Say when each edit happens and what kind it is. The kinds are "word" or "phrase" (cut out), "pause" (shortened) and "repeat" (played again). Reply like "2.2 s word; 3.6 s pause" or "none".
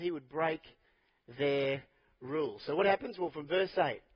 none